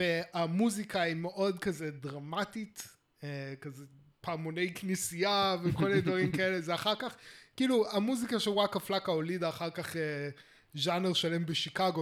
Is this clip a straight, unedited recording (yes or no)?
yes